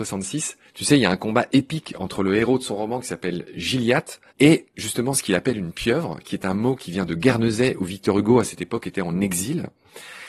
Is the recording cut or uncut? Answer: cut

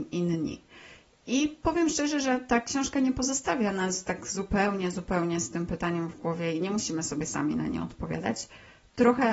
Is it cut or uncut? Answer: uncut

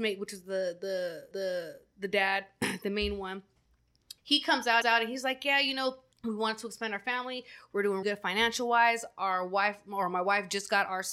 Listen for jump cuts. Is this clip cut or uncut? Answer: cut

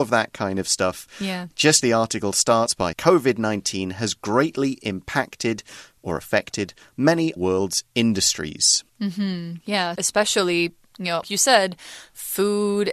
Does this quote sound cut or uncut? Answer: cut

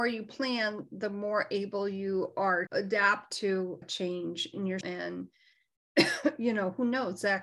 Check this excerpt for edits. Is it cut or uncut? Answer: cut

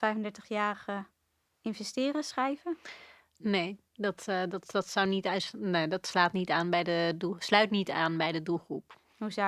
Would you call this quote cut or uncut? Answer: uncut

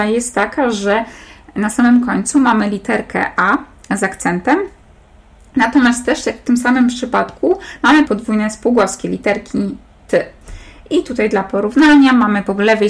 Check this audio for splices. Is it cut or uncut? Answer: cut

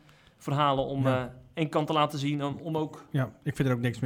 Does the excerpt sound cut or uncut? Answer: uncut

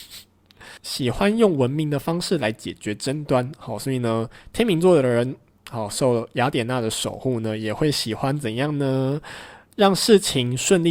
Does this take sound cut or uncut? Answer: uncut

